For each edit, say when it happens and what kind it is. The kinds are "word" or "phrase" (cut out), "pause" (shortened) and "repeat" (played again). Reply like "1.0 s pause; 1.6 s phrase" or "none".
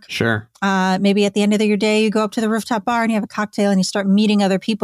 none